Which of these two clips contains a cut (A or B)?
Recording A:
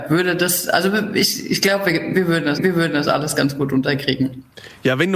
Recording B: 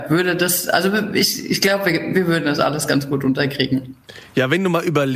A